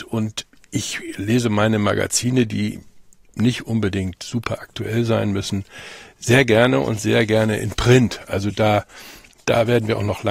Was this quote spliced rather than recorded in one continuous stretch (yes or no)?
no